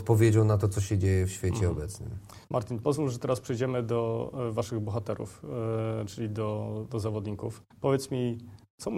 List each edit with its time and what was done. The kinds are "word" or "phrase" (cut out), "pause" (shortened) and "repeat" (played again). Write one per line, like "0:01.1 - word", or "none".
0:02.4 - pause
0:07.7 - pause